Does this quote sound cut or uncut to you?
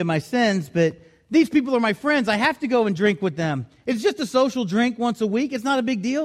uncut